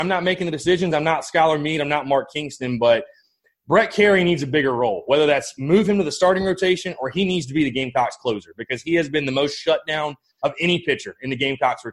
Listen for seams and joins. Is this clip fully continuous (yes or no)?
yes